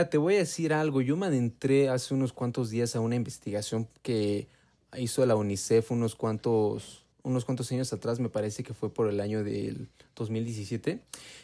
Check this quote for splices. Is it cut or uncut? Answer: cut